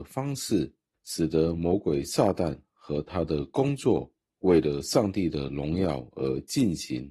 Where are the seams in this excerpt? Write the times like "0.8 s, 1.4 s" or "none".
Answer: none